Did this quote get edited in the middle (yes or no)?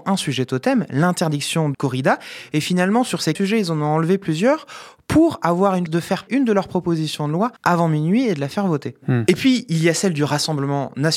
yes